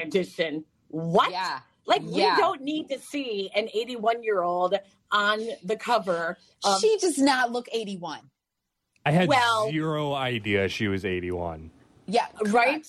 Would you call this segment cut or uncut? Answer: uncut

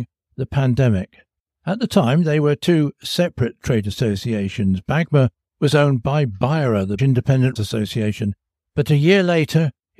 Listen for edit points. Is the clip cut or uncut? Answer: cut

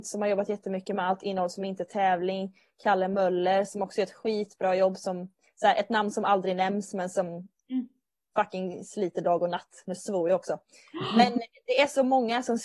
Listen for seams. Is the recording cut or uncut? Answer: uncut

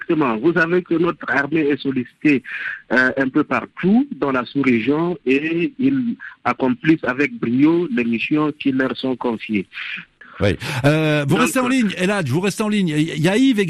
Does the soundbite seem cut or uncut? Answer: cut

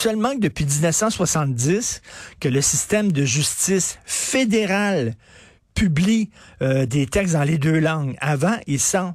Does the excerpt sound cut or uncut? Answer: uncut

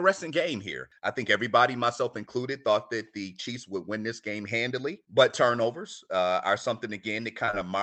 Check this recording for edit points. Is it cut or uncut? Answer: uncut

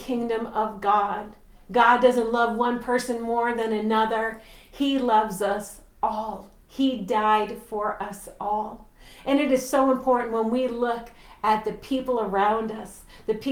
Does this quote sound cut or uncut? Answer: uncut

